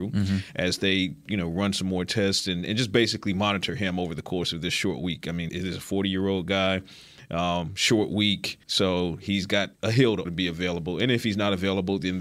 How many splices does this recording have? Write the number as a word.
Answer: four